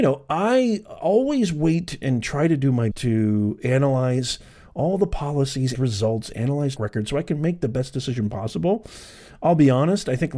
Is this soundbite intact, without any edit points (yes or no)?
no